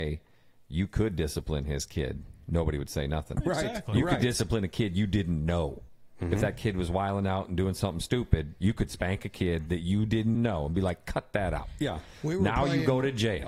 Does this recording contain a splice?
yes; 1 cut; at 10.3 s

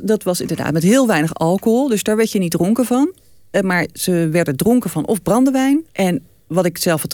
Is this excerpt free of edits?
no; 1 cut; at 5.9 s

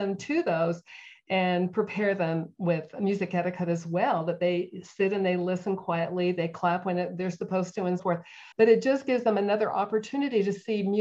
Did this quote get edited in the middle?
yes; 2 cuts; at 8.0 s, 8.5 s

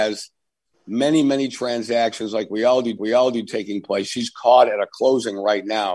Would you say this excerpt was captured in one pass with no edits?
no; 1 cut; at 3.0 s

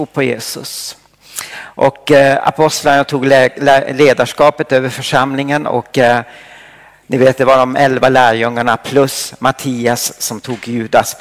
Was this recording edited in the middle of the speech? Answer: no; 0 cuts

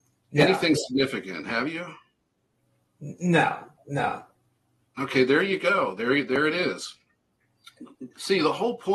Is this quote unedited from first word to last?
yes; 0 cuts

